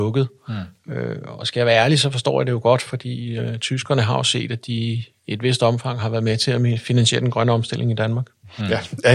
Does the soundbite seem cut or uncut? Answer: uncut